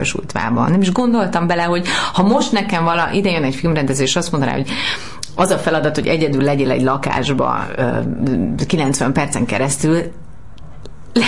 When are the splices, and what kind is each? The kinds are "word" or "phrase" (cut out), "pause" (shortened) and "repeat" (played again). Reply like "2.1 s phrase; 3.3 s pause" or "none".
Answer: none